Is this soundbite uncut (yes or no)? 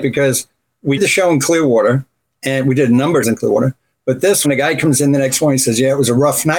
no